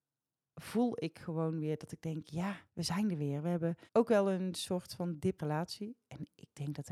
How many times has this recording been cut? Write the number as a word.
three